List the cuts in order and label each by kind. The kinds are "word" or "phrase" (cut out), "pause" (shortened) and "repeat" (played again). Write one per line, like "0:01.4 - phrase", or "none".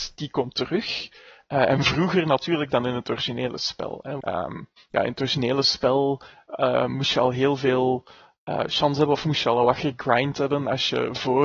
0:04.2 - word